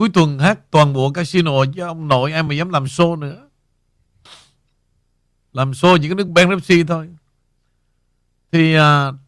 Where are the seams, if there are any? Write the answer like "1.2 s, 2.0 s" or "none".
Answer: none